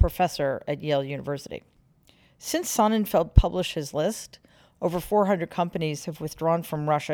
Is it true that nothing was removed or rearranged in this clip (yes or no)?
yes